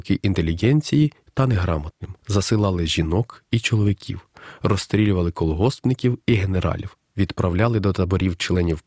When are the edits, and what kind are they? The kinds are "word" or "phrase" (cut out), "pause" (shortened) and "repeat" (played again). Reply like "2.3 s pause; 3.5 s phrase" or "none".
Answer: 2.2 s pause; 7.1 s pause